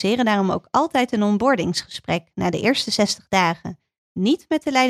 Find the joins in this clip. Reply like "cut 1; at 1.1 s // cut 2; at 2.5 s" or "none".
none